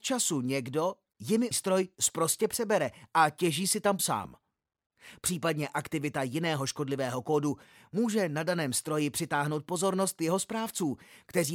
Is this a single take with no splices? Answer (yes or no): no